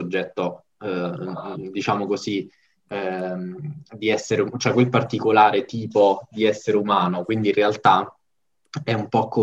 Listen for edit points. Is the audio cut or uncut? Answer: uncut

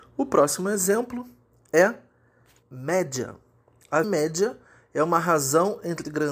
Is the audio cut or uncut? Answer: cut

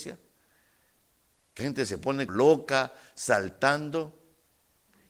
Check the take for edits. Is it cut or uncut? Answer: cut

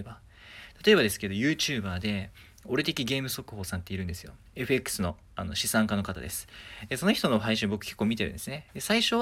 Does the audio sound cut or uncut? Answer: uncut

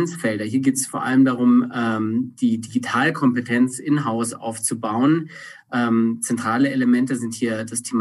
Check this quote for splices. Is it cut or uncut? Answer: uncut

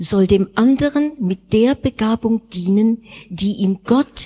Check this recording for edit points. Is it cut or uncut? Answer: uncut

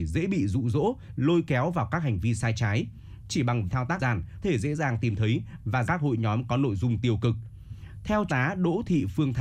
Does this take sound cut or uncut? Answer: cut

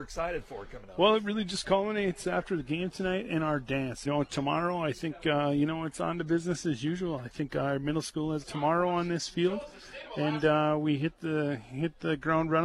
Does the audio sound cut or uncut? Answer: cut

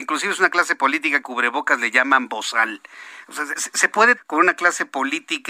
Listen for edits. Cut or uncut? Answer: cut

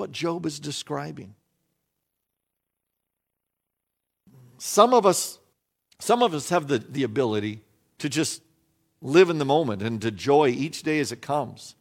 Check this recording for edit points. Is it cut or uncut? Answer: cut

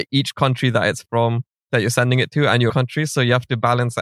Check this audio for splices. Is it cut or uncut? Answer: cut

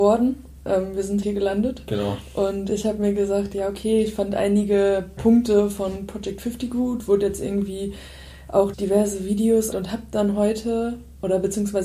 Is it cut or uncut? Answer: cut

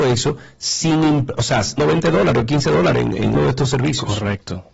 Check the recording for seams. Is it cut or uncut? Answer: cut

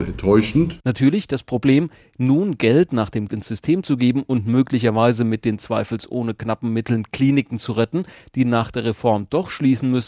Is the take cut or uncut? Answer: cut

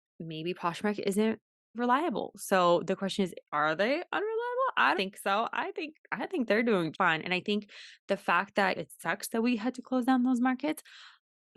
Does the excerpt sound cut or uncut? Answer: cut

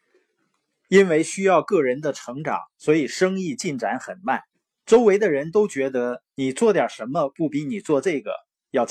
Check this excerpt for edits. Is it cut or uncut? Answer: cut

